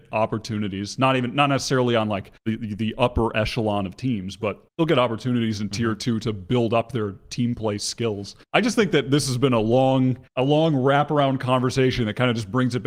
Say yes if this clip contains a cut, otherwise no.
yes